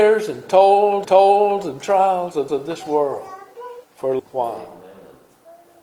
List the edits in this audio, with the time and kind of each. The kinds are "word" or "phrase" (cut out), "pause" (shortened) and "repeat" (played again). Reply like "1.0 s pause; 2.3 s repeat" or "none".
1.0 s repeat; 2.5 s repeat; 3.8 s pause; 4.2 s word